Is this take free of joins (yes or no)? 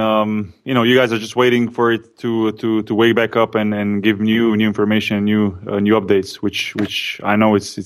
yes